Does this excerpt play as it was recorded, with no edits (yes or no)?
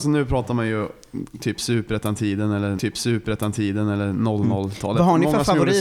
no